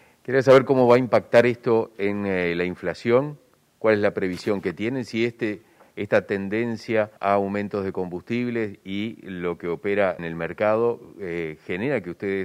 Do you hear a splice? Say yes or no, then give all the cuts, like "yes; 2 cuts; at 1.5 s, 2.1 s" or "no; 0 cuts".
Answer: yes; 2 cuts; at 7.2 s, 10.2 s